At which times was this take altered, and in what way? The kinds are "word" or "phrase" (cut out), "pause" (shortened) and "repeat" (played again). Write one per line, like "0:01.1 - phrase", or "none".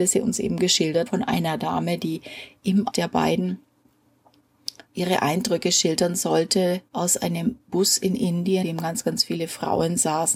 0:01.1 - word
0:02.9 - word
0:04.9 - pause
0:06.9 - pause
0:08.6 - word